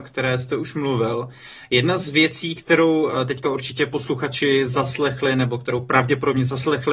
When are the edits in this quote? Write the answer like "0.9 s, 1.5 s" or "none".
none